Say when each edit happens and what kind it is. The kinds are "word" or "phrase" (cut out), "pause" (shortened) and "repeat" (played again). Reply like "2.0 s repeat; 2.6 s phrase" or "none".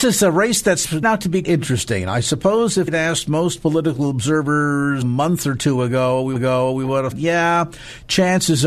1.0 s word; 1.4 s word; 2.9 s word; 5.0 s phrase; 6.4 s repeat; 7.1 s word